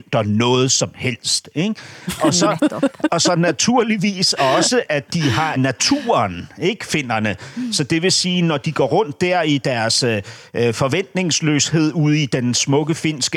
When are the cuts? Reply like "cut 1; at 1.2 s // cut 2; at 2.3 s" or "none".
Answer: cut 1; at 3.1 s // cut 2; at 5.6 s